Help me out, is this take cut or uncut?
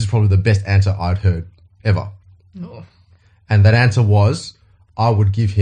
uncut